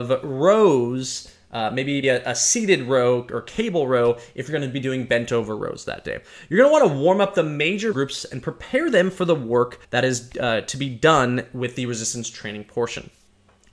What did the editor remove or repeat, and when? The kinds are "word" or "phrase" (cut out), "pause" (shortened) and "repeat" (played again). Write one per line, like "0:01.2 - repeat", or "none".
0:02.0 - word
0:07.9 - word
0:09.8 - pause

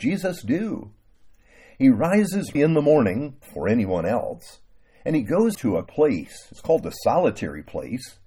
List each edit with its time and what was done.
0:02.5 - word
0:05.5 - word
0:05.9 - word

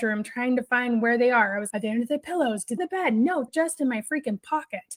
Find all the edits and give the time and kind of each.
0:01.7 - word
0:02.8 - phrase
0:03.5 - word

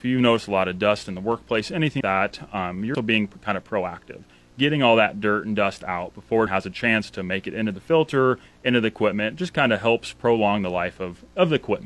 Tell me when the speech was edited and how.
0:02.0 - word
0:02.9 - word
0:06.5 - word

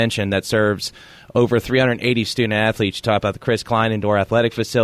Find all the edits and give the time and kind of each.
none

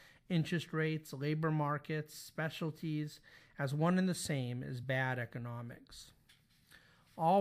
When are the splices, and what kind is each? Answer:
none

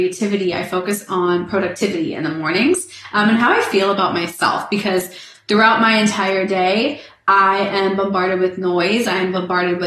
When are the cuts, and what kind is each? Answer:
none

